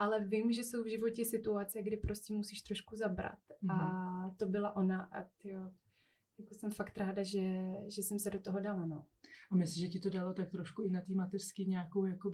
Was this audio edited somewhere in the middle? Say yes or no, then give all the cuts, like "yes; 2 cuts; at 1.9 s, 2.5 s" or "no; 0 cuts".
no; 0 cuts